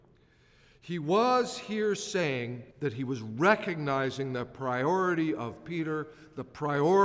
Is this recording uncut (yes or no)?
no